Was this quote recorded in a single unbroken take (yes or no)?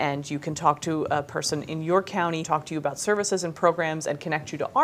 no